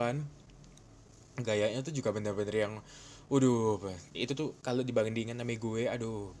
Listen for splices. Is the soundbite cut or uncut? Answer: cut